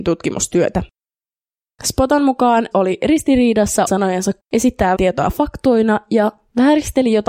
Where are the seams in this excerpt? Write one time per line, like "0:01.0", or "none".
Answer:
0:02.7
0:03.9
0:04.4
0:04.9